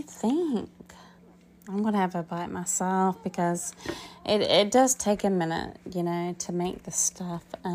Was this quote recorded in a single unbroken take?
no; 1 cut; at 1.2 s

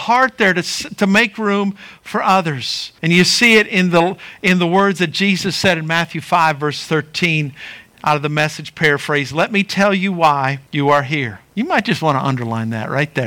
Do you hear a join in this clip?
yes; 3 cuts; at 3.0 s, 10.7 s, 11.5 s

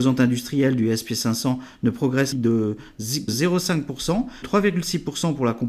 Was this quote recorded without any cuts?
no; 3 cuts; at 2.3 s, 3.3 s, 4.4 s

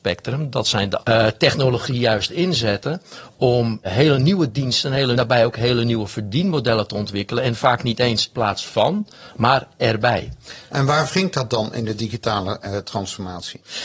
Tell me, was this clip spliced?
yes; 4 cuts; at 1.0 s, 3.8 s, 5.2 s, 8.3 s

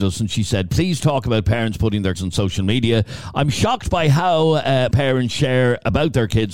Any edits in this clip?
yes; 2 cuts; at 2.1 s, 4.9 s

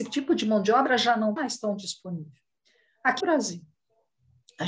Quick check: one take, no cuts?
no; 2 cuts; at 1.4 s, 3.2 s

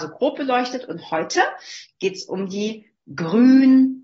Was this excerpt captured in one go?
yes; 0 cuts

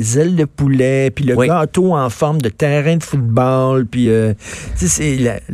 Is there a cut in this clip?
no; 0 cuts

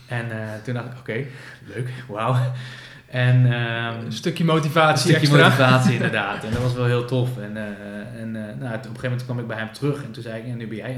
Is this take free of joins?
yes; 0 cuts

